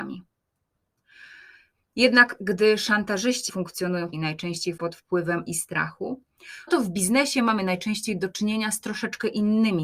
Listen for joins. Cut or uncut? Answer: cut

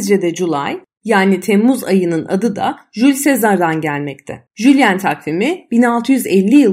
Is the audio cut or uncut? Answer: cut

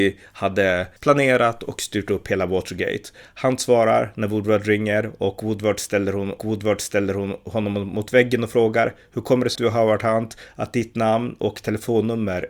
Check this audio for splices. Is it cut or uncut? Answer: cut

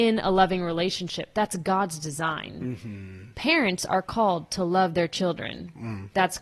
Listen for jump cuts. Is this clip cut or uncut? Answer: uncut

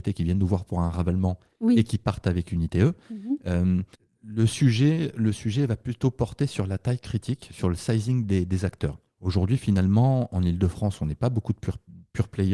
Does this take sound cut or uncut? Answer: cut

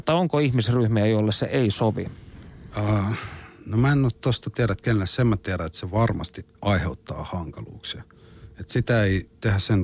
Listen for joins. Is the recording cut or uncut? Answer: cut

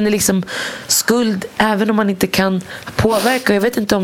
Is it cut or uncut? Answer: uncut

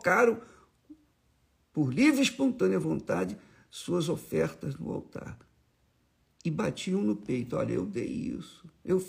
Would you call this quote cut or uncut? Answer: uncut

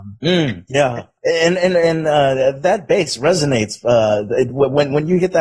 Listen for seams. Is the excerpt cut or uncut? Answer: uncut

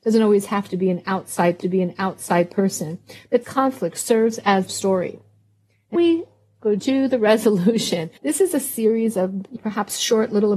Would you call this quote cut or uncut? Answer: cut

